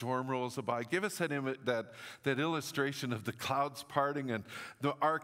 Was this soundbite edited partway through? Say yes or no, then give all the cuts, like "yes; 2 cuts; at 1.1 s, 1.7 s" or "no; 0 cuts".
no; 0 cuts